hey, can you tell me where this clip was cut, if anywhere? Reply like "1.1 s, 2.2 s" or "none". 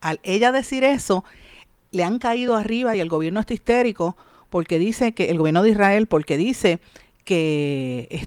none